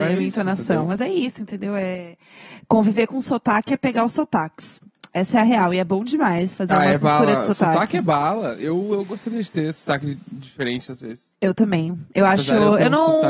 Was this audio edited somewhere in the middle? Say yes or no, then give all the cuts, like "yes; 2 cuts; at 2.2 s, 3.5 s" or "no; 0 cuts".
no; 0 cuts